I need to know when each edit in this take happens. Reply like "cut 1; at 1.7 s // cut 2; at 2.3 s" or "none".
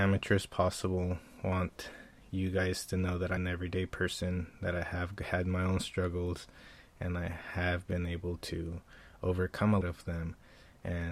cut 1; at 3.4 s // cut 2; at 9.8 s